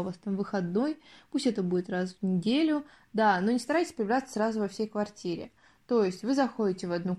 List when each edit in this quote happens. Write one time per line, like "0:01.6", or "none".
none